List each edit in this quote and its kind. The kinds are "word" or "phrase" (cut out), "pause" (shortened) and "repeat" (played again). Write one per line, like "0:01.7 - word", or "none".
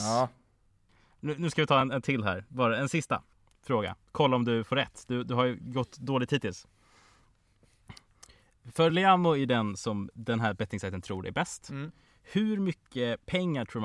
none